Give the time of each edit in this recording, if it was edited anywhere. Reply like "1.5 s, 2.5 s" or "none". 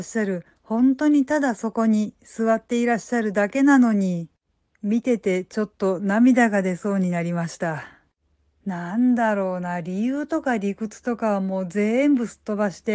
none

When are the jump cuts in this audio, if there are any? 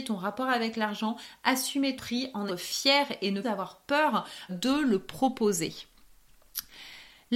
2.0 s, 2.5 s, 3.4 s, 4.5 s

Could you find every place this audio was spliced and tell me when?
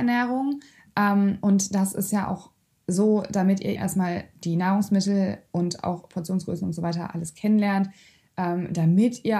3.8 s

